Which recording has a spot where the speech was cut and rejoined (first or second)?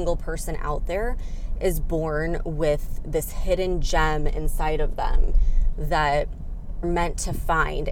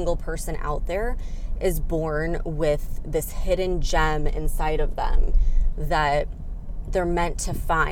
first